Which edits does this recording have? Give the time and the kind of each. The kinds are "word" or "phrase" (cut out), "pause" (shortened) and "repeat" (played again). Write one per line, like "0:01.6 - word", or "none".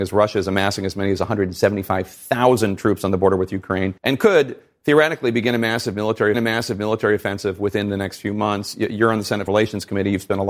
0:04.0 - pause
0:06.3 - repeat
0:09.5 - word